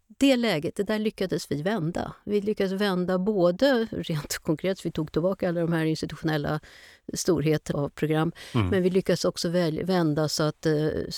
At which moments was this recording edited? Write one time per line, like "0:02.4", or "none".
0:07.7